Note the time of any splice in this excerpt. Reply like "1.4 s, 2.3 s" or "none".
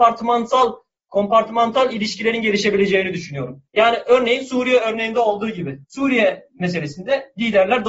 3.7 s, 5.8 s